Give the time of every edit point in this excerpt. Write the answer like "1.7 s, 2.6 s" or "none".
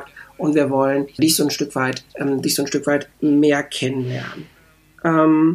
1.2 s, 2.1 s, 3.1 s